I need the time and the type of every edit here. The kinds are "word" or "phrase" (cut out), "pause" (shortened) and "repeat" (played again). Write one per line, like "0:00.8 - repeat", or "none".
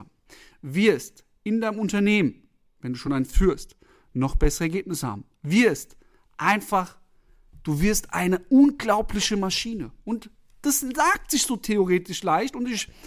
none